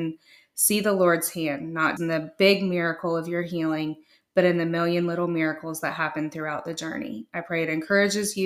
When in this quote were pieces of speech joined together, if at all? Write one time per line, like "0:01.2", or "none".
0:02.0